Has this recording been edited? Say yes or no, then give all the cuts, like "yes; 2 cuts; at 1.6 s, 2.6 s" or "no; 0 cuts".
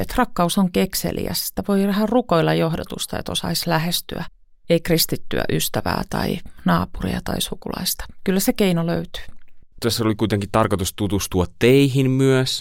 no; 0 cuts